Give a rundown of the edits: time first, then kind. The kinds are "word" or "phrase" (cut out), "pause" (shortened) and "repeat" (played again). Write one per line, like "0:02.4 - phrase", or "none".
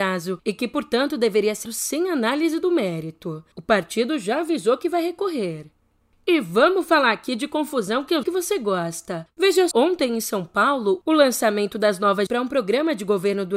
0:01.6 - word
0:08.2 - word
0:09.7 - word
0:12.3 - word

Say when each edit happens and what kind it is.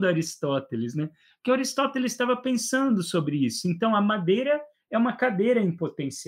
none

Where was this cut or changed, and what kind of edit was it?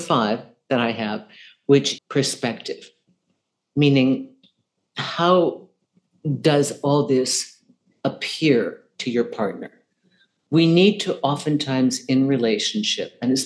0:02.0 - word

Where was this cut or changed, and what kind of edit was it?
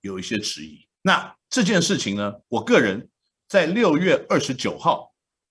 0:00.9 - pause
0:02.4 - pause

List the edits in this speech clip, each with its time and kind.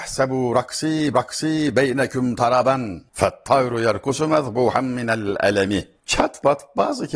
0:01.1 - repeat
0:03.1 - pause

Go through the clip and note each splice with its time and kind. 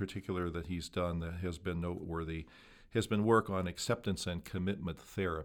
none

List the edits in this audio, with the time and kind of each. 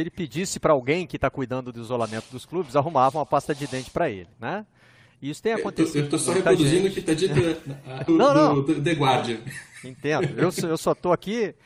0:04.3 - pause
0:08.1 - phrase

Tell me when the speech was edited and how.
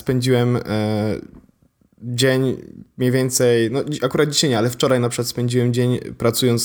none

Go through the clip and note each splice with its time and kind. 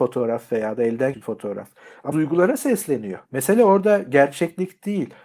0:01.1 - word
0:02.1 - word
0:03.2 - pause

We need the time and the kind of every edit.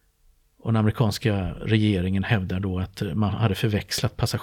none

